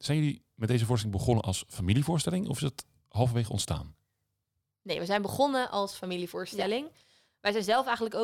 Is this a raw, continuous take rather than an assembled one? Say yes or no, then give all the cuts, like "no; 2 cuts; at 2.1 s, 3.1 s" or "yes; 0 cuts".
yes; 0 cuts